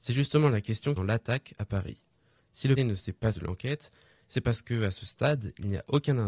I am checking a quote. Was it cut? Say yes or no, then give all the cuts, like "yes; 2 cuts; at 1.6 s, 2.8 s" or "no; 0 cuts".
yes; 3 cuts; at 1.0 s, 2.8 s, 3.3 s